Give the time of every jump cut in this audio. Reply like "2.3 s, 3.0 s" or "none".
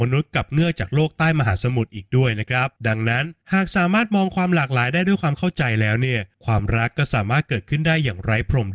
2.8 s, 3.4 s, 6.3 s